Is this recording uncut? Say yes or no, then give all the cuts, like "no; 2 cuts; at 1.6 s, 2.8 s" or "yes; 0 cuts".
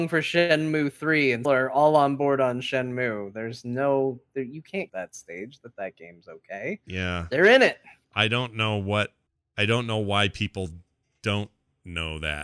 no; 3 cuts; at 1.4 s, 4.9 s, 9.3 s